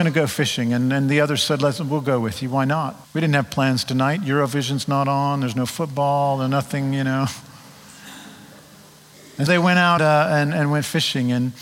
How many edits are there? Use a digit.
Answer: 3